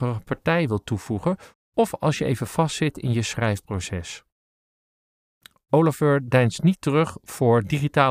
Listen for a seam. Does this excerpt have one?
no; 0 cuts

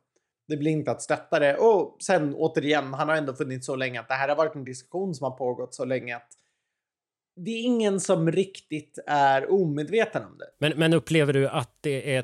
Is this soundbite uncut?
yes; 0 cuts

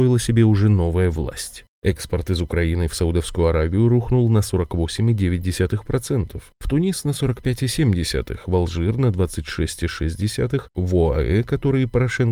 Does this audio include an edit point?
no; 0 cuts

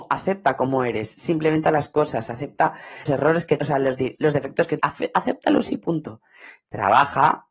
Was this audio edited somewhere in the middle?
yes; 5 cuts; at 1.6 s, 3.1 s, 3.6 s, 4.1 s, 4.8 s

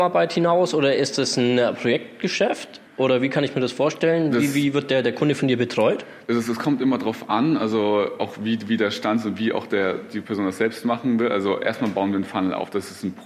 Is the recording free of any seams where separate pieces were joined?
no; 1 cut; at 2.9 s

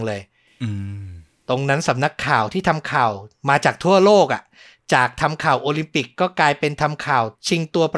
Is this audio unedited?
yes; 0 cuts

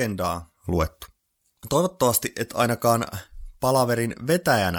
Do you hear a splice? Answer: no; 0 cuts

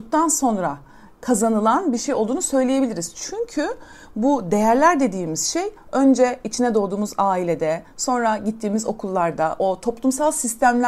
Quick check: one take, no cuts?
yes; 0 cuts

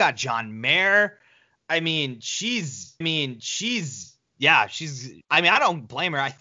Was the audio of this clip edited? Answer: yes; 2 cuts; at 3.0 s, 5.2 s

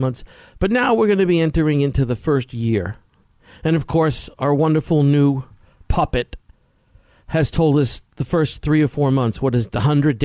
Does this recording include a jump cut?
no; 0 cuts

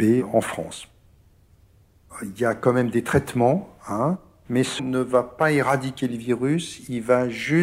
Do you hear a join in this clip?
yes; 1 cut; at 4.8 s

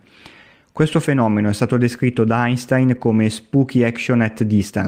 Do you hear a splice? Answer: no; 0 cuts

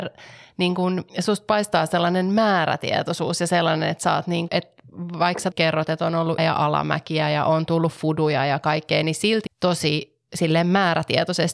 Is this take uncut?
no; 5 cuts; at 1.1 s, 4.5 s, 5.5 s, 6.4 s, 9.5 s

